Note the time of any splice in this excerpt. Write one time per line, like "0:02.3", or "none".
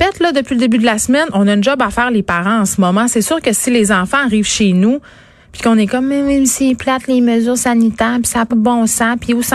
0:08.5